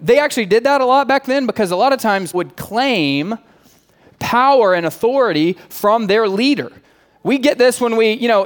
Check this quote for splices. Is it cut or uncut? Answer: cut